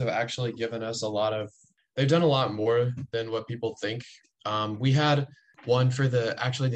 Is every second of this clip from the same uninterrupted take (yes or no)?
yes